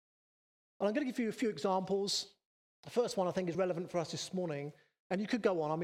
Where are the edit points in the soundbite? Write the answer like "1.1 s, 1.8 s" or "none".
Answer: 3.5 s

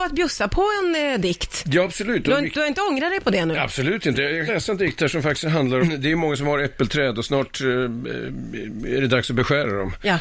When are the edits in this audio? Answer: 4.5 s, 5.8 s

